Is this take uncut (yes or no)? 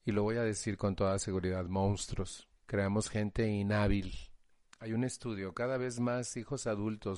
no